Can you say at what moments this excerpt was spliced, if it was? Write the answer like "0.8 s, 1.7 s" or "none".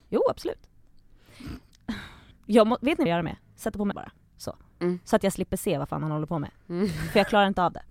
2.3 s, 3.1 s, 3.9 s